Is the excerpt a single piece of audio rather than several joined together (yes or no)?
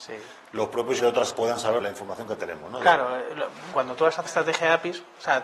no